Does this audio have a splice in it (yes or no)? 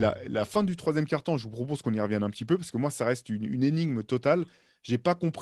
no